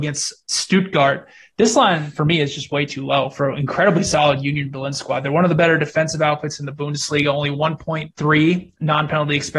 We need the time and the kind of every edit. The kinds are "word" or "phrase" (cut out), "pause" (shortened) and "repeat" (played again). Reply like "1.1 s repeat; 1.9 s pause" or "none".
none